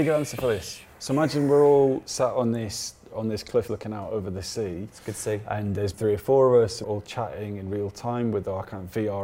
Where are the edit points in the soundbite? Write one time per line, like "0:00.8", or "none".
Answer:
0:03.7
0:05.9
0:06.8